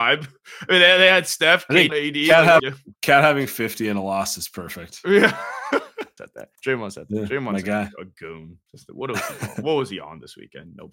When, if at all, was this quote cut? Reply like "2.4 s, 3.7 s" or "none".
1.9 s, 2.6 s, 2.9 s, 6.2 s, 6.5 s, 8.7 s